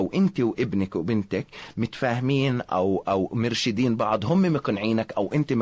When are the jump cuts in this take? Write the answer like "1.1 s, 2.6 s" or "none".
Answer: none